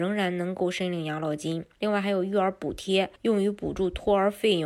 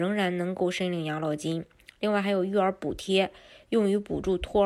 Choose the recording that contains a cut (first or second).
first